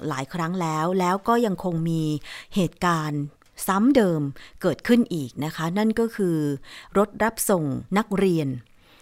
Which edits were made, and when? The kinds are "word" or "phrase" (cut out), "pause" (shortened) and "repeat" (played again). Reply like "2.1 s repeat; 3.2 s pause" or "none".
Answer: 7.9 s pause